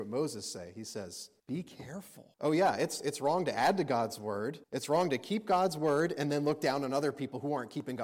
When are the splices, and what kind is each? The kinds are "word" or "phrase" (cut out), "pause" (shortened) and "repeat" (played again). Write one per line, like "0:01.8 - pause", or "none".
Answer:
0:01.4 - pause
0:02.3 - pause
0:04.6 - pause